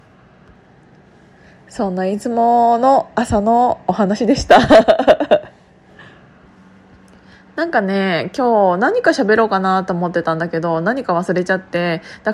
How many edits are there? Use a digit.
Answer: 0